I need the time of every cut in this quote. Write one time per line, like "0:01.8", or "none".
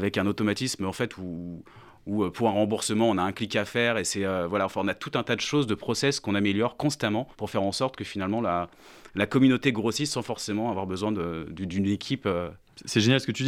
0:07.3